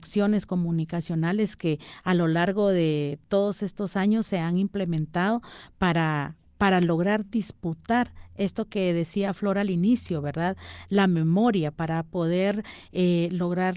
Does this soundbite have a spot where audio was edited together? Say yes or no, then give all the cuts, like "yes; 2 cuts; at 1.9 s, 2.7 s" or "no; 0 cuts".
no; 0 cuts